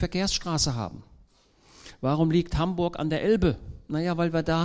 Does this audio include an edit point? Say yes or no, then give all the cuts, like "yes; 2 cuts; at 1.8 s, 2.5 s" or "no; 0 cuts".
no; 0 cuts